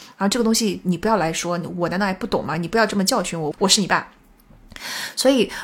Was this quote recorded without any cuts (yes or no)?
no